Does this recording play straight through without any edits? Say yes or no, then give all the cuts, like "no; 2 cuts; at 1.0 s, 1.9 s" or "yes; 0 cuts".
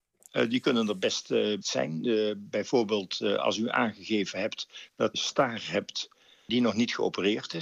no; 2 cuts; at 1.6 s, 5.1 s